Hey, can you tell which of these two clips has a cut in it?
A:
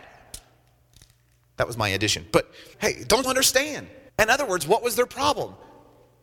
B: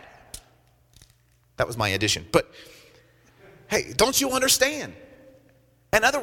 A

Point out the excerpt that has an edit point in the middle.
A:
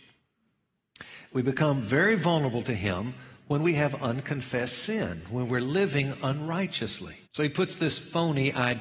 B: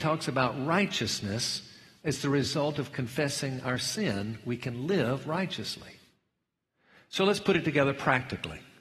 A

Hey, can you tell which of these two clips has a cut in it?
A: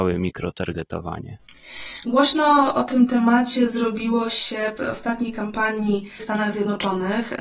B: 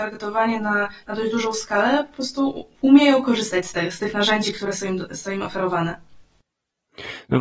A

